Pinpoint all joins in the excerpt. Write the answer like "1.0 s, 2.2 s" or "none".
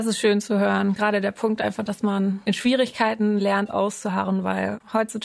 none